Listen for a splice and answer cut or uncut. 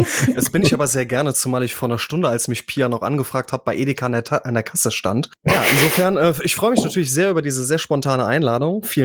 uncut